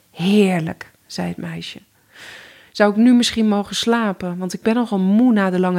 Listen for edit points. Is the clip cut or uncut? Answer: uncut